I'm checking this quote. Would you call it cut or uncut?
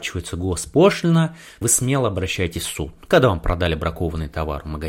cut